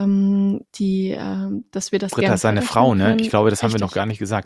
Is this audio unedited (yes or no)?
yes